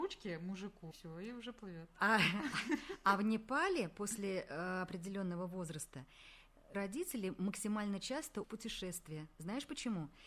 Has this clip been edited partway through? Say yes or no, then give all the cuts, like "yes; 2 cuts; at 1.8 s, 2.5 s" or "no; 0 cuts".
yes; 3 cuts; at 0.9 s, 6.7 s, 8.4 s